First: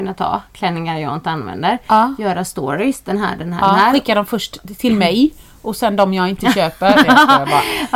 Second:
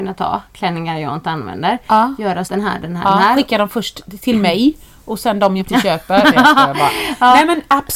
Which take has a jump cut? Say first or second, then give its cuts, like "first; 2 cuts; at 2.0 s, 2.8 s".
second; 2 cuts; at 2.5 s, 5.6 s